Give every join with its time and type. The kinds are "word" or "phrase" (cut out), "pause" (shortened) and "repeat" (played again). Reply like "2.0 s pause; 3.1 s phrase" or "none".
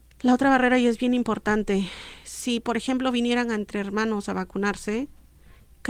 none